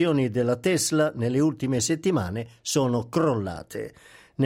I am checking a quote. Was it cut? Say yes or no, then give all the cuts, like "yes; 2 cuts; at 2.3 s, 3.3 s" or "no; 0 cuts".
no; 0 cuts